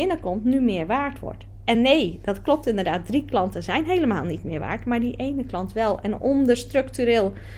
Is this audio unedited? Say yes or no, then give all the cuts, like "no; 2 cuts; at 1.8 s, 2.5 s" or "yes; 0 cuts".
yes; 0 cuts